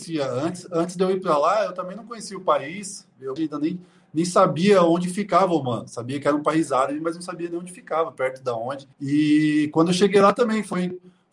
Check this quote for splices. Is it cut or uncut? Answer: cut